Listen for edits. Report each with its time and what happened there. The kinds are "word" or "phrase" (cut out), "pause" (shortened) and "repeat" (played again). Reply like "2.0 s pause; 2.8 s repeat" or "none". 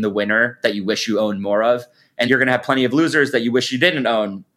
2.3 s word